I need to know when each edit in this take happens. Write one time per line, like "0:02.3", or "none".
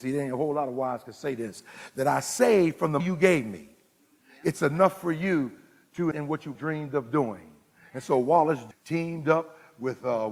0:03.0
0:06.1
0:06.6
0:08.7